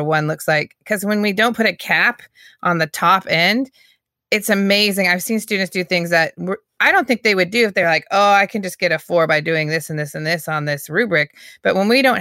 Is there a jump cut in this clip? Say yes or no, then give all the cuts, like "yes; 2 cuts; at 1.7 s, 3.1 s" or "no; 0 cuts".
no; 0 cuts